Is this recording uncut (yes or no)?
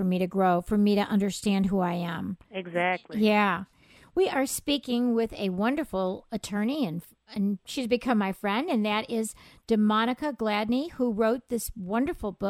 yes